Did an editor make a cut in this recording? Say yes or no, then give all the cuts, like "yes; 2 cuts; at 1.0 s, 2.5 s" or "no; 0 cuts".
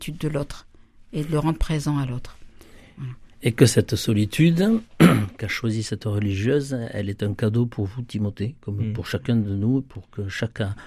yes; 1 cut; at 3.3 s